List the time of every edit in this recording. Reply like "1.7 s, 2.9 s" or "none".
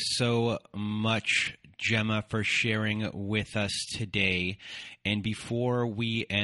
none